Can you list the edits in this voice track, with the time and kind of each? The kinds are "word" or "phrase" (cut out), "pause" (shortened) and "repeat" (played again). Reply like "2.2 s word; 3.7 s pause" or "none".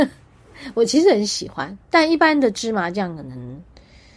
1.8 s pause